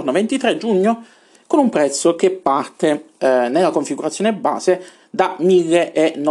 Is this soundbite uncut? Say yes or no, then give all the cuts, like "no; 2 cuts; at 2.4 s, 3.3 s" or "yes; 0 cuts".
yes; 0 cuts